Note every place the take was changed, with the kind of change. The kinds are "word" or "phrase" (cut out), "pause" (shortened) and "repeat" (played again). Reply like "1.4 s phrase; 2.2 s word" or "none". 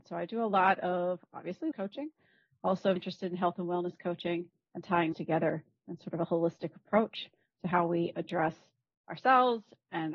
1.7 s word; 3.0 s word; 5.1 s word